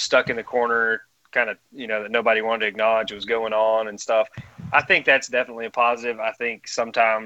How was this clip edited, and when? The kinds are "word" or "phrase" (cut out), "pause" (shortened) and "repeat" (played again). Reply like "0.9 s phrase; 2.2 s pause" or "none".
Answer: 1.7 s pause